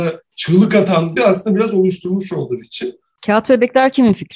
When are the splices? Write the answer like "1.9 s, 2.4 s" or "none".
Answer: 1.2 s, 2.6 s